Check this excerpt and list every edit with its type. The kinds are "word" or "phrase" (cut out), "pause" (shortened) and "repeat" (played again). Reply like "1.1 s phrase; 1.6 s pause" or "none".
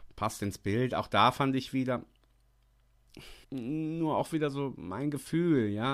3.4 s pause